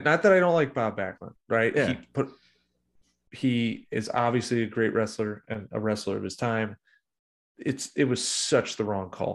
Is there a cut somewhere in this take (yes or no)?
no